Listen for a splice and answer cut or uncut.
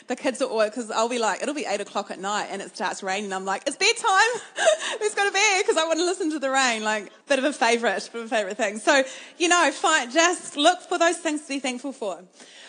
cut